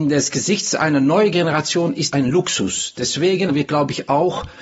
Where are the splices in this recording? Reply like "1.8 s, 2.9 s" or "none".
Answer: 2.1 s, 3.5 s